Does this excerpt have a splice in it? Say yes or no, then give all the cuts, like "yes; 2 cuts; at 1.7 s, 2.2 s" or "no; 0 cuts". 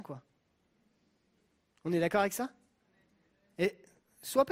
no; 0 cuts